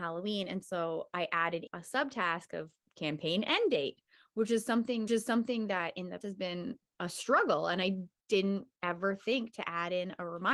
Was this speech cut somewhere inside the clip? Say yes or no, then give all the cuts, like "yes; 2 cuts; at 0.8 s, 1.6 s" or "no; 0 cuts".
yes; 3 cuts; at 1.7 s, 5.1 s, 6.2 s